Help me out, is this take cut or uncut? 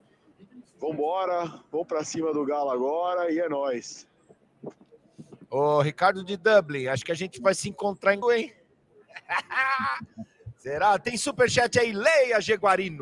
cut